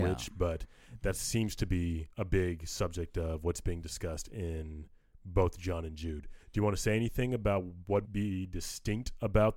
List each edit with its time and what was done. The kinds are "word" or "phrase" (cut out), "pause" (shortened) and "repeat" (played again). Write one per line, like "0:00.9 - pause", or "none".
0:02.1 - pause
0:06.4 - pause
0:08.0 - word